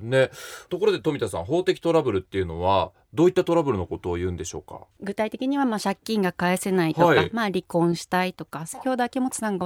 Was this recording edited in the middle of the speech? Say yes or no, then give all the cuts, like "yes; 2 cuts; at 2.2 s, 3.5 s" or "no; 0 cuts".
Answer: yes; 1 cut; at 4.9 s